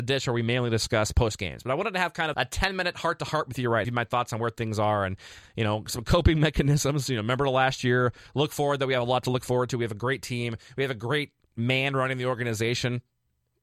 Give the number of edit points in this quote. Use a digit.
2